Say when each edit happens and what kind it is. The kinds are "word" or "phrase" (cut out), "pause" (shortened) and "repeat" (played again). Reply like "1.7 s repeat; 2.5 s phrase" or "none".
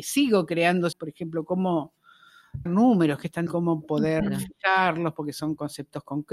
0.9 s word; 2.7 s word; 3.5 s word